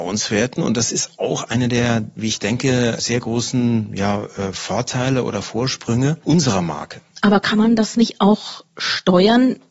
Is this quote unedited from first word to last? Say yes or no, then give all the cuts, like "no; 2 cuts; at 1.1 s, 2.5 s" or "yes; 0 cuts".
yes; 0 cuts